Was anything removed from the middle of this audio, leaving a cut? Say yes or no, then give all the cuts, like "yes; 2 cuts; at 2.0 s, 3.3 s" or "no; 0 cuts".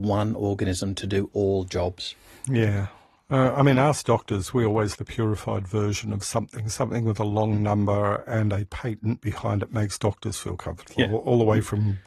yes; 1 cut; at 5.0 s